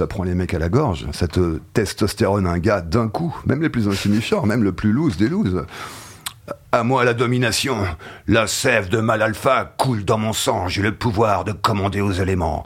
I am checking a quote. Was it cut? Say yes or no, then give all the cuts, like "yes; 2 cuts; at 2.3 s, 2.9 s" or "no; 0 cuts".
no; 0 cuts